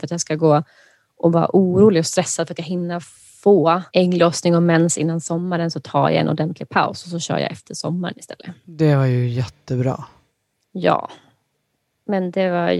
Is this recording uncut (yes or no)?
no